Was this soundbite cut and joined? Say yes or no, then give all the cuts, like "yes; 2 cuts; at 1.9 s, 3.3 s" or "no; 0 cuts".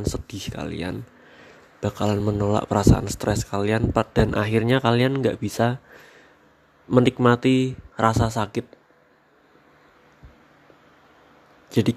no; 0 cuts